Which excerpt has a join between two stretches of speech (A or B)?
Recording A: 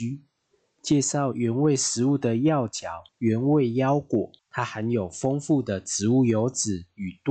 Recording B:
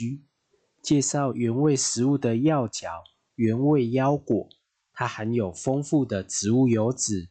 A